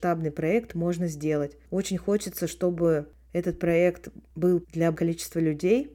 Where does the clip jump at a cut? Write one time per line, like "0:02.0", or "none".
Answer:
0:04.6
0:04.9

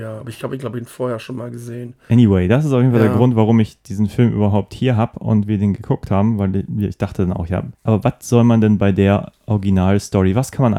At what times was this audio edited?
0:07.7

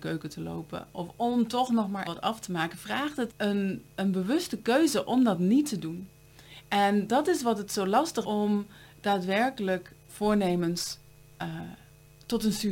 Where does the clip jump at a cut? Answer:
0:02.0
0:03.3
0:08.2
0:10.1

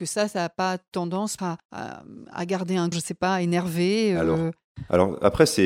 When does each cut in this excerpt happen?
0:01.4
0:02.9

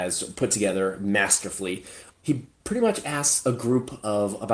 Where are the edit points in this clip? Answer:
0:02.1

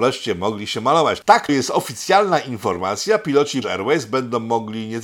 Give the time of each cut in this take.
0:01.5
0:03.6

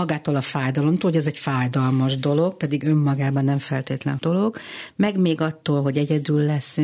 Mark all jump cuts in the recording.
0:04.2

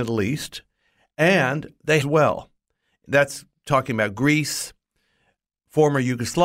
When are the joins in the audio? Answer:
0:02.0

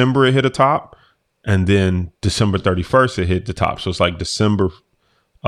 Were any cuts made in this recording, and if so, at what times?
none

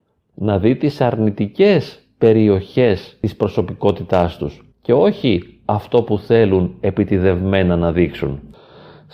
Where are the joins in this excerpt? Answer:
0:04.7

